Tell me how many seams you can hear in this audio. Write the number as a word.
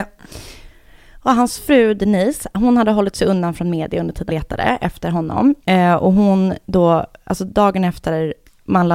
two